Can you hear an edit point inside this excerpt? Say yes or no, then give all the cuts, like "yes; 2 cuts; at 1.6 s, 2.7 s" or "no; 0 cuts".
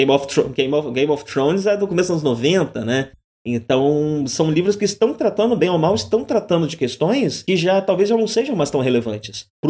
no; 0 cuts